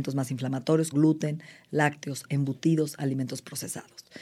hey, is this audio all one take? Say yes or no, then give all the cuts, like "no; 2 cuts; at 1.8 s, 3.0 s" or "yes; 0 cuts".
no; 2 cuts; at 0.9 s, 2.2 s